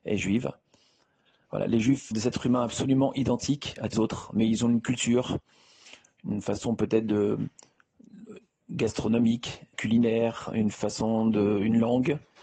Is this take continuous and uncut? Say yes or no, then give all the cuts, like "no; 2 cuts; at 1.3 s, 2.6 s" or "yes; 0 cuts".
no; 3 cuts; at 2.1 s, 3.9 s, 9.7 s